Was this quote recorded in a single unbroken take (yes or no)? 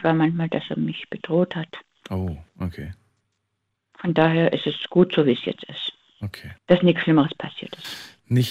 no